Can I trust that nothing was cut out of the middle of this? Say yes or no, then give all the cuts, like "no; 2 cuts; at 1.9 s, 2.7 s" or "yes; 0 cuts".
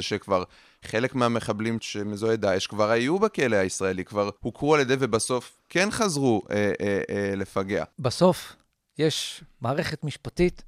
no; 3 cuts; at 1.8 s, 4.4 s, 7.9 s